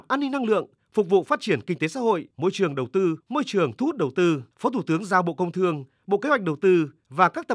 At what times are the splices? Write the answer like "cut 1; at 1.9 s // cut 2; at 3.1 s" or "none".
cut 1; at 2.3 s // cut 2; at 3.2 s // cut 3; at 4.5 s